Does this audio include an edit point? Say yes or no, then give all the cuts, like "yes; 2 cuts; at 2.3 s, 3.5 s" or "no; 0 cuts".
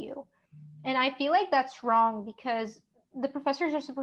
no; 0 cuts